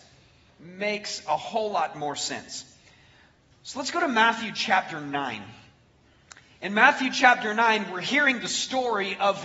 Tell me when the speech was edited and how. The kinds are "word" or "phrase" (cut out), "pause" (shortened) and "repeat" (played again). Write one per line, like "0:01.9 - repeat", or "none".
none